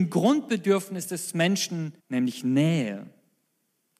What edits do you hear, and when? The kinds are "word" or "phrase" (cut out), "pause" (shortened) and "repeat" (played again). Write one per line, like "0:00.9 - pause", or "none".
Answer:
0:02.0 - pause